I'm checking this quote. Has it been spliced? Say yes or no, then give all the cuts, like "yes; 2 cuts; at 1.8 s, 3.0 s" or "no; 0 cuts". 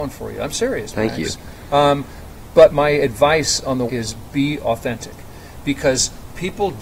yes; 2 cuts; at 2.7 s, 3.9 s